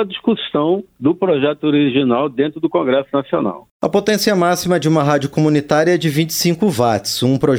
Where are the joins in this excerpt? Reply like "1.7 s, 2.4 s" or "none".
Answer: none